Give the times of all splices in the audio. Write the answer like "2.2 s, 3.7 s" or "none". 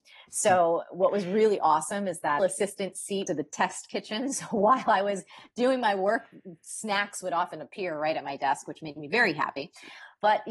2.4 s, 3.3 s